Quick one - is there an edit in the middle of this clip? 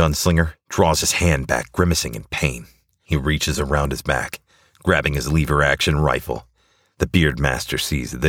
no; 0 cuts

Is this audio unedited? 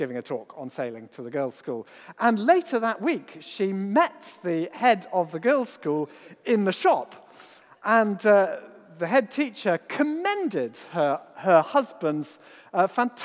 yes; 0 cuts

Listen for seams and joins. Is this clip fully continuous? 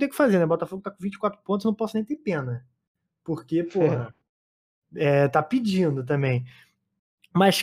yes; 0 cuts

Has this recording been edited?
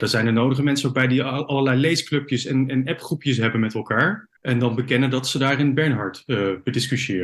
yes; 1 cut; at 4.4 s

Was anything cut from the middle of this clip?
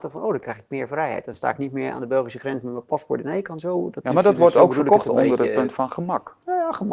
no; 0 cuts

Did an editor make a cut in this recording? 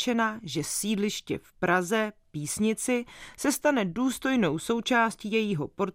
no; 0 cuts

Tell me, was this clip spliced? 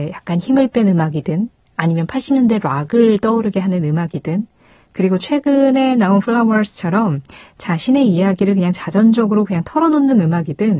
no; 0 cuts

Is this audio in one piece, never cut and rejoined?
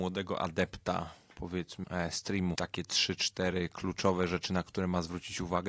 no; 2 cuts; at 1.8 s, 2.6 s

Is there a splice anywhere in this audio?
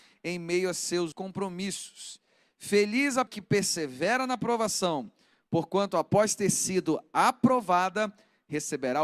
yes; 2 cuts; at 1.1 s, 3.3 s

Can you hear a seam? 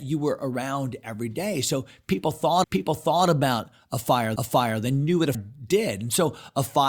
yes; 3 cuts; at 2.6 s, 4.4 s, 5.3 s

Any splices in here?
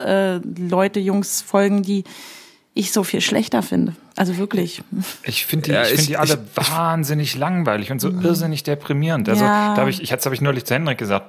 no; 0 cuts

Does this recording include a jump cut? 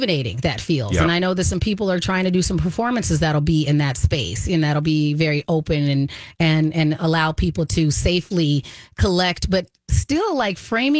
no; 0 cuts

